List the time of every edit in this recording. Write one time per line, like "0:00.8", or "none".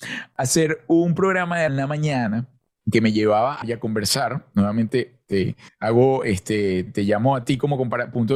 0:01.7
0:02.7
0:03.6
0:05.7
0:06.9